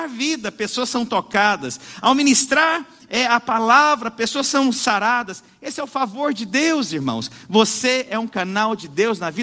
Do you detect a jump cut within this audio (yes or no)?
no